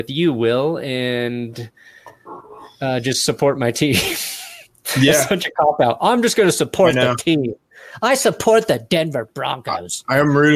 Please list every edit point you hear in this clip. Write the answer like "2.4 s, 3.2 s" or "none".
none